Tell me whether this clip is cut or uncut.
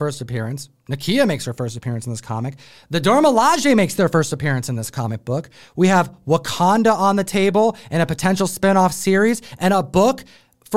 uncut